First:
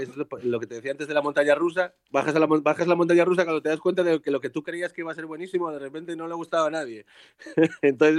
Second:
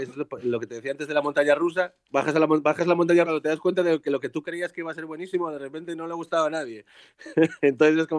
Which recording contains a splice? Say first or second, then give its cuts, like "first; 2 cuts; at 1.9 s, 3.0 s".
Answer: second; 1 cut; at 3.2 s